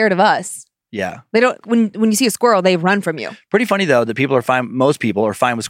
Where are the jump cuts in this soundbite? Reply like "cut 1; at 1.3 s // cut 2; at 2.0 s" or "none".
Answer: cut 1; at 1.6 s